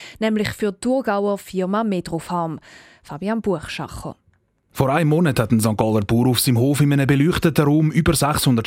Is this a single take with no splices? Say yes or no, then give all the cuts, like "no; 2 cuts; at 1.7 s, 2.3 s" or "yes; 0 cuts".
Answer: yes; 0 cuts